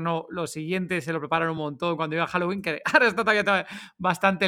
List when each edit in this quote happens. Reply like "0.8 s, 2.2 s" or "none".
none